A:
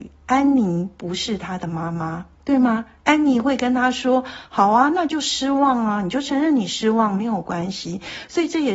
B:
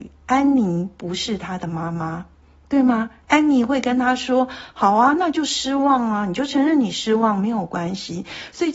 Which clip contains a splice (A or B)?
A